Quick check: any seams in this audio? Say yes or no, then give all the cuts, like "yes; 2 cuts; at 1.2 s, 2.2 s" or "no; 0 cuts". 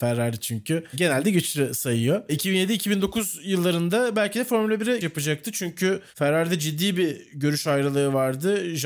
yes; 1 cut; at 5.0 s